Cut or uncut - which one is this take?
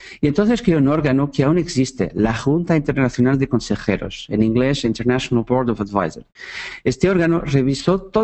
uncut